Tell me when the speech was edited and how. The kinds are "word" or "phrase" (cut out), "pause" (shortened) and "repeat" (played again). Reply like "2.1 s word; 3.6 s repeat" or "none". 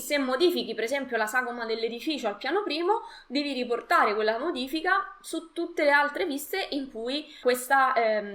7.4 s word